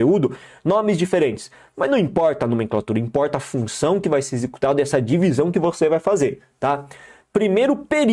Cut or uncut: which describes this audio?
uncut